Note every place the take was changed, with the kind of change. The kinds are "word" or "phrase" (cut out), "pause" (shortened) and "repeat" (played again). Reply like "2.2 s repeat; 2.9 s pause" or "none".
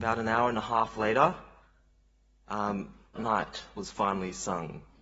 3.2 s word